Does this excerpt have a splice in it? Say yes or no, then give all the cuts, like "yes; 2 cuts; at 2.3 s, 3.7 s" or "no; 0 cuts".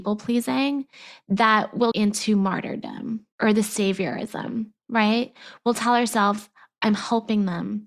yes; 2 cuts; at 1.9 s, 3.3 s